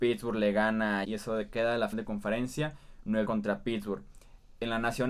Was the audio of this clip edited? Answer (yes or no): yes